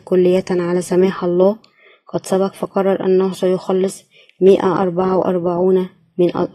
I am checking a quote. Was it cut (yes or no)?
no